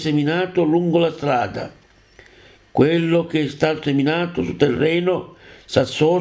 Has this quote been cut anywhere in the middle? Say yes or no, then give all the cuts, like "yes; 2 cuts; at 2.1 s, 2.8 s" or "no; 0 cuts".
no; 0 cuts